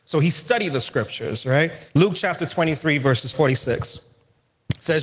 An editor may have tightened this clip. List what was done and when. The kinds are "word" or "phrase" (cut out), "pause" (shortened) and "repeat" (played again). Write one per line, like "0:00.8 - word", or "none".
0:01.9 - pause
0:03.3 - word